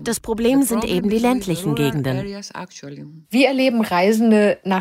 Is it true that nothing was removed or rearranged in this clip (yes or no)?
no